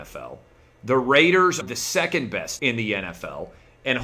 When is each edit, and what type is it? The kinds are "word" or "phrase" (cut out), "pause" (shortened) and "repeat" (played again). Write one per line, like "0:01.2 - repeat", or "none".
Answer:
0:01.6 - word
0:02.6 - word